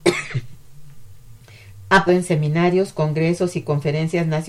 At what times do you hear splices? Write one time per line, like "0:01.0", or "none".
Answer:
0:02.1